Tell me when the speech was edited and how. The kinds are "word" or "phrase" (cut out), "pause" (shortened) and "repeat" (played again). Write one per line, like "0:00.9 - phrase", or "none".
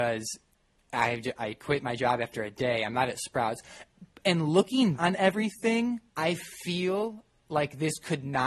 0:05.0 - word
0:06.1 - pause